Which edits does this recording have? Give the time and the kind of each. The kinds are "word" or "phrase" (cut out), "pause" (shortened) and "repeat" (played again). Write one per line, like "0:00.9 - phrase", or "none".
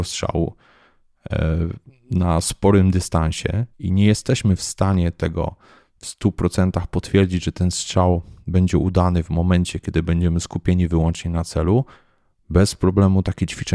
0:03.7 - pause